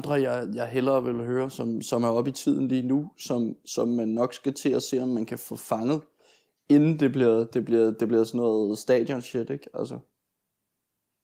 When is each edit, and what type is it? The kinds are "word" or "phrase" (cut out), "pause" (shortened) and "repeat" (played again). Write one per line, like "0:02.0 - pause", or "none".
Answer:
none